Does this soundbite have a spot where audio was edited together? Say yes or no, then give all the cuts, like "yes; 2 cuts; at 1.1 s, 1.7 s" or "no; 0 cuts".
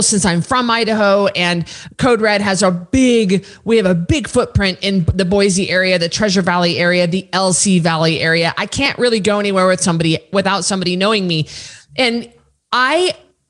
no; 0 cuts